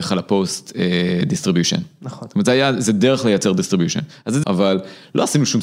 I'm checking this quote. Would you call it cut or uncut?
cut